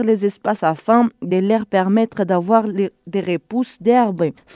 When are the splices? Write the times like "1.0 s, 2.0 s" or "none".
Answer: none